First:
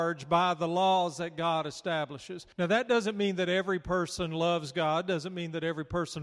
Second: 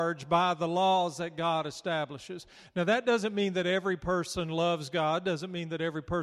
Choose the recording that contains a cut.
first; 1 cut; at 2.5 s

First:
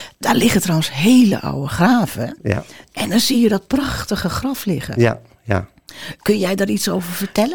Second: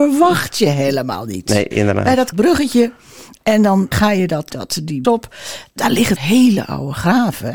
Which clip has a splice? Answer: second; 6 cuts; at 1.7 s, 2.3 s, 3.9 s, 4.5 s, 5.0 s, 6.2 s

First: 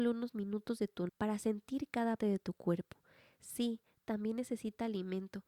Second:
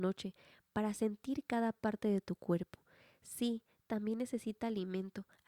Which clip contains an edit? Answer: first; 2 cuts; at 1.1 s, 2.2 s

